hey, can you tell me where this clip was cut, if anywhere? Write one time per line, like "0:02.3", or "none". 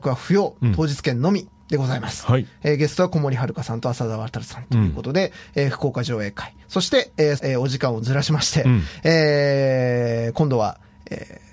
0:01.6
0:06.6
0:07.4